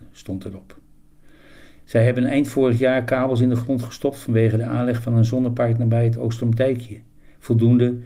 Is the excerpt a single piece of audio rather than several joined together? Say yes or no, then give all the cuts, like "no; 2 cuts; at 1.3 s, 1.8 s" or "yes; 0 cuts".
yes; 0 cuts